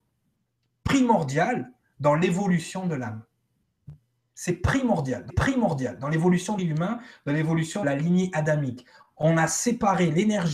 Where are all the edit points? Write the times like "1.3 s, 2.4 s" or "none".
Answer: 5.3 s, 6.6 s, 7.8 s